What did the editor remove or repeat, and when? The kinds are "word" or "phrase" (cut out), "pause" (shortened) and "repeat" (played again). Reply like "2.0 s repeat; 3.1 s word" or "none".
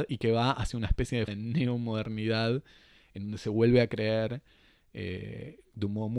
1.3 s word